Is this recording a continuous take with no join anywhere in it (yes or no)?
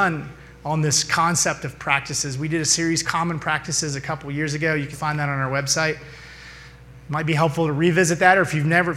no